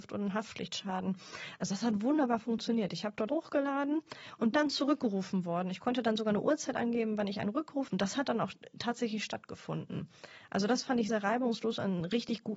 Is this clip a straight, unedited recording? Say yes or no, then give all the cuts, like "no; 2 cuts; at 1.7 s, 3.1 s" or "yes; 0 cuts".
no; 4 cuts; at 3.3 s, 4.5 s, 7.9 s, 11.1 s